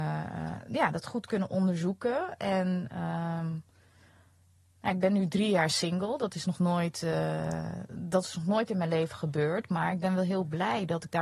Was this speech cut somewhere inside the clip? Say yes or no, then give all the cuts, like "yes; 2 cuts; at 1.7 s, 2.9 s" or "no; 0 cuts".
no; 0 cuts